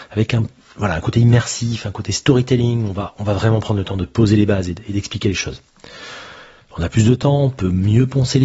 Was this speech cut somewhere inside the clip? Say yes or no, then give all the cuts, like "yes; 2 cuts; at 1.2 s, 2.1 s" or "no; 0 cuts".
no; 0 cuts